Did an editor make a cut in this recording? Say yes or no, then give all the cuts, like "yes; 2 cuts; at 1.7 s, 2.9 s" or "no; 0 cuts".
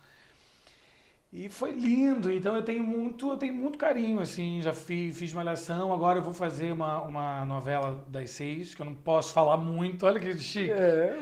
no; 0 cuts